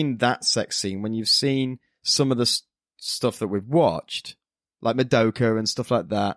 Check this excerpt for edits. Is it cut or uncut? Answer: uncut